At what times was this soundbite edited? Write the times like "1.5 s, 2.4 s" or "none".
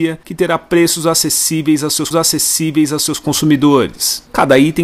2.1 s